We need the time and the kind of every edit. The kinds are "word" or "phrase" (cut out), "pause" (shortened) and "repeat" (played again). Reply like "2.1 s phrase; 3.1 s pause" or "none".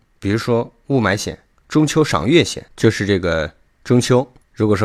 2.7 s pause